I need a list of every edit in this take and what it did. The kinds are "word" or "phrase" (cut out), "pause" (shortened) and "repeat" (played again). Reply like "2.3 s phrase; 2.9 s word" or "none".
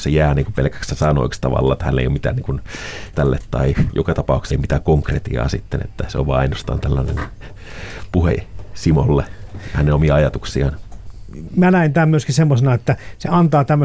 3.1 s word; 4.5 s word